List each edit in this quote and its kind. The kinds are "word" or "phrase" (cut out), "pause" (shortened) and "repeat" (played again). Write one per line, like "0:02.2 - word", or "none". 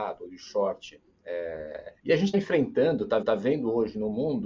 0:02.0 - pause
0:02.3 - word
0:03.2 - repeat